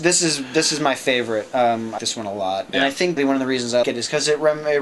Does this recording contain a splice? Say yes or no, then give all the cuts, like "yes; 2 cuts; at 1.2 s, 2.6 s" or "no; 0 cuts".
yes; 3 cuts; at 2.0 s, 3.2 s, 3.8 s